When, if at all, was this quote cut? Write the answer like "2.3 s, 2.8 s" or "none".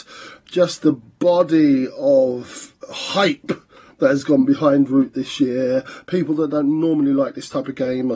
2.8 s